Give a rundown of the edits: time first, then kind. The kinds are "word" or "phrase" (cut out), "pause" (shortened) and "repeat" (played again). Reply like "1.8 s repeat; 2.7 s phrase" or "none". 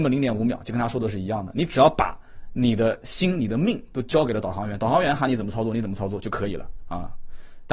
none